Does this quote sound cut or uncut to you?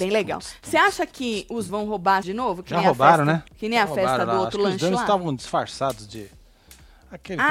cut